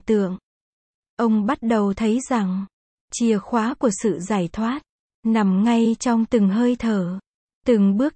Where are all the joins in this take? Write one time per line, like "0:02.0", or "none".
none